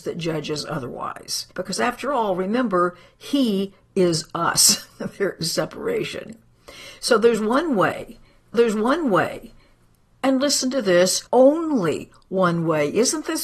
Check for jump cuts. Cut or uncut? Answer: cut